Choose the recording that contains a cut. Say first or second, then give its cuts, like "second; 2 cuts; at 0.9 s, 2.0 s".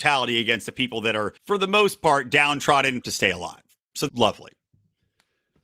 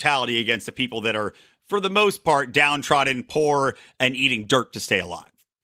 first; 3 cuts; at 1.4 s, 3.0 s, 4.1 s